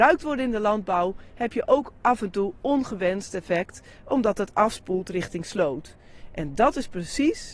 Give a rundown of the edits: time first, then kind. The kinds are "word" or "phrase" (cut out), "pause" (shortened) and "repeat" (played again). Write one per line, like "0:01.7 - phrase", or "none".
none